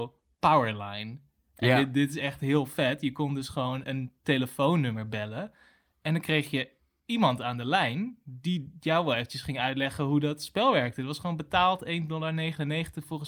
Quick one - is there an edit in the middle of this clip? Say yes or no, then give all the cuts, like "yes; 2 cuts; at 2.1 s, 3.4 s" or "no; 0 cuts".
yes; 1 cut; at 3.8 s